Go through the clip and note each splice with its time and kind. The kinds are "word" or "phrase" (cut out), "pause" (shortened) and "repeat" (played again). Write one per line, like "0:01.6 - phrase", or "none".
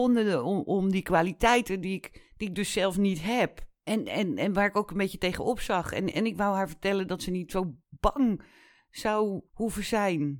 0:02.2 - pause
0:03.8 - pause
0:07.8 - pause
0:09.5 - pause